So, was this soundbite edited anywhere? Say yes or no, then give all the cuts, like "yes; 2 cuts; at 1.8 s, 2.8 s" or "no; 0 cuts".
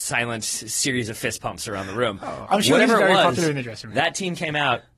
yes; 1 cut; at 2.5 s